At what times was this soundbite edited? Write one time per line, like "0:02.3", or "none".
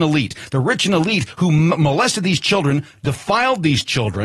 none